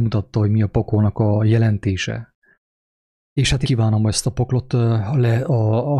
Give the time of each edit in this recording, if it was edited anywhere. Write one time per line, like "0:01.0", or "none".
0:03.6